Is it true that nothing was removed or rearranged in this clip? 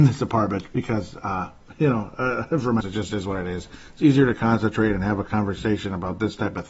no; 1 cut; at 2.8 s

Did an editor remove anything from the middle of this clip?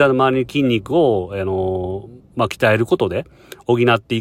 no; 0 cuts

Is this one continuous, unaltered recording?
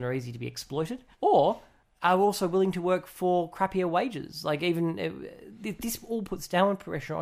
no; 1 cut; at 1.1 s

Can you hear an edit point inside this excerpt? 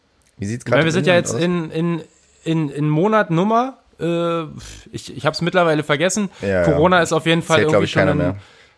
yes; 1 cut; at 2.7 s

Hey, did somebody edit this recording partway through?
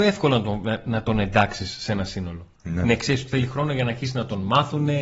yes; 1 cut; at 2.6 s

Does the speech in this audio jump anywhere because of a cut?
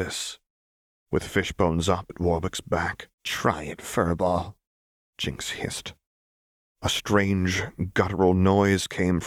yes; 2 cuts; at 2.1 s, 3.1 s

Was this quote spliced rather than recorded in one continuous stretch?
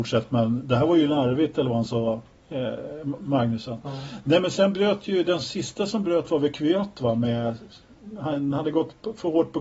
no; 0 cuts

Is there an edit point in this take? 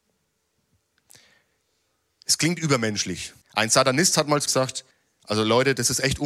yes; 3 cuts; at 3.4 s, 4.5 s, 4.9 s

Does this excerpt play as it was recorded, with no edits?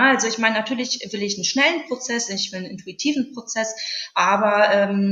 yes; 0 cuts

